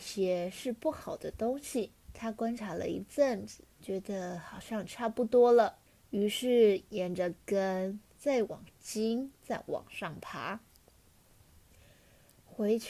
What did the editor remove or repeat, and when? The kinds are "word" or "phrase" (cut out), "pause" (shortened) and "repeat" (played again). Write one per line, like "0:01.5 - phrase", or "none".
0:02.0 - pause
0:03.7 - pause
0:05.9 - pause